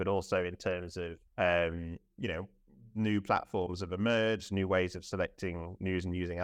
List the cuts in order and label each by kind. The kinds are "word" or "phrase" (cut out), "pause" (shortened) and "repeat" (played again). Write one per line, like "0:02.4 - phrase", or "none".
0:01.3 - pause